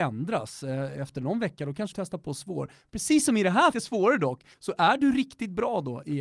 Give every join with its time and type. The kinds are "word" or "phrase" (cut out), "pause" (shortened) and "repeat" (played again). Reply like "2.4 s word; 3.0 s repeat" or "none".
1.9 s word; 3.7 s phrase; 4.5 s pause